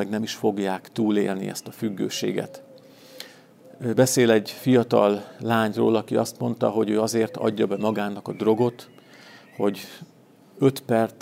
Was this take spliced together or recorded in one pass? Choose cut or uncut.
uncut